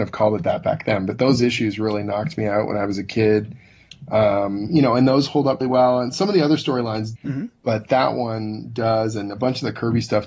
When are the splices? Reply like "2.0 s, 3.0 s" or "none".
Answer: 5.6 s, 7.2 s

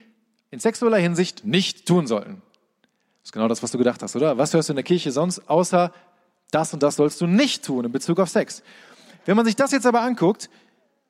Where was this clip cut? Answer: none

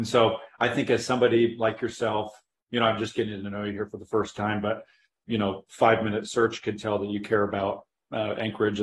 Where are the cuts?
none

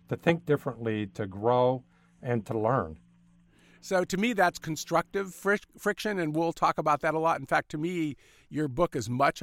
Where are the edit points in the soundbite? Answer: none

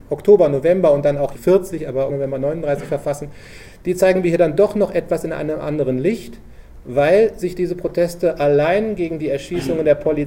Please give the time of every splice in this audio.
1.3 s, 2.1 s

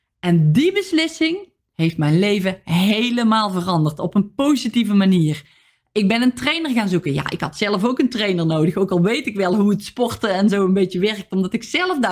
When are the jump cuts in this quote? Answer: none

